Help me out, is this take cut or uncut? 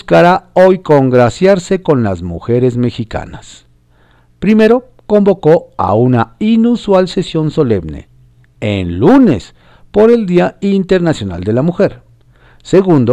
uncut